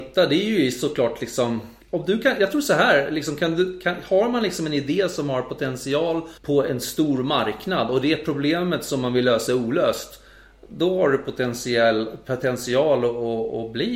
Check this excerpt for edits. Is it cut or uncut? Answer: cut